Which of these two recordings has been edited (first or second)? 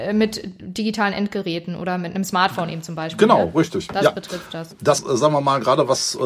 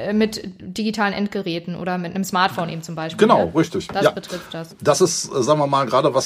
first